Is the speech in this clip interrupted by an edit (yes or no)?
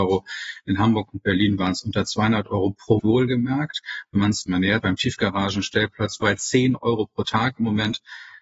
yes